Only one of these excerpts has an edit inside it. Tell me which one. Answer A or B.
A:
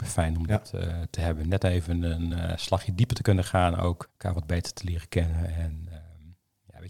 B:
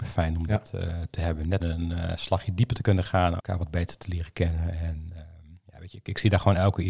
B